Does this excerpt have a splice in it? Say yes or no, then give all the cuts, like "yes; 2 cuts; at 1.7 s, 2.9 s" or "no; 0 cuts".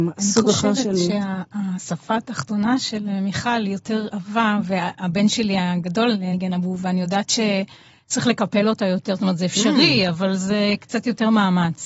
no; 0 cuts